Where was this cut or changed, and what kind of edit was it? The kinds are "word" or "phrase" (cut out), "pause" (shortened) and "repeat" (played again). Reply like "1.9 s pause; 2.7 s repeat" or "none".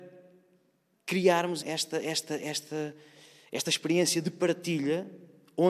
1.6 s word